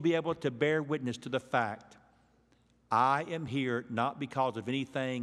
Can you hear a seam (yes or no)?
no